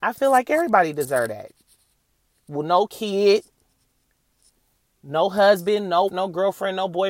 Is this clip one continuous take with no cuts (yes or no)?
no